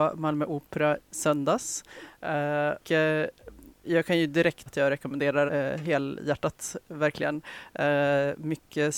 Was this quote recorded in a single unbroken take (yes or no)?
no